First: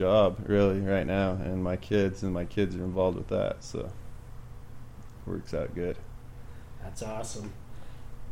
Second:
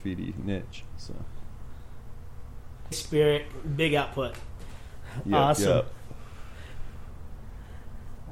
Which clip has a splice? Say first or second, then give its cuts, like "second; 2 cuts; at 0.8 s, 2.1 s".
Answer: second; 1 cut; at 2.9 s